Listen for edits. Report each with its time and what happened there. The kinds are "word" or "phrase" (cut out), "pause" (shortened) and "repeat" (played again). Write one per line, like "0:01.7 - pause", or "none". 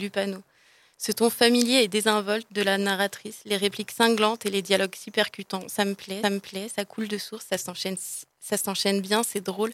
0:06.2 - repeat